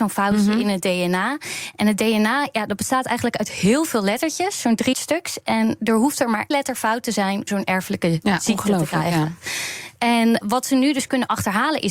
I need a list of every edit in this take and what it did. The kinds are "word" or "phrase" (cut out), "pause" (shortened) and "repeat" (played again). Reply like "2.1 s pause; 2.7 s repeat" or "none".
4.9 s word; 6.5 s word; 7.5 s word; 10.4 s word